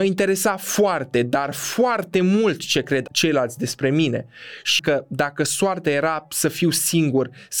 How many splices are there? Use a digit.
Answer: 1